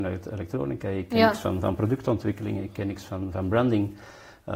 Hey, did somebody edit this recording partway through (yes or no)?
no